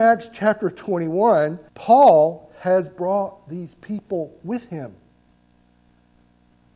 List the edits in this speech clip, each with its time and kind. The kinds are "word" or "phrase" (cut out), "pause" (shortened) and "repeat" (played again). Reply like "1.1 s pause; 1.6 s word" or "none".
1.7 s pause